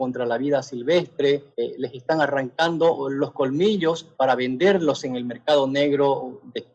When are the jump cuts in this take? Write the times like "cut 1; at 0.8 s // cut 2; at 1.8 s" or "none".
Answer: cut 1; at 1.5 s // cut 2; at 4.1 s